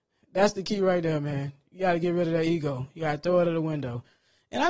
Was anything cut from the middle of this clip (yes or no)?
yes